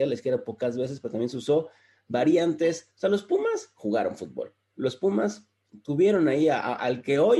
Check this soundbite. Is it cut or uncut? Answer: uncut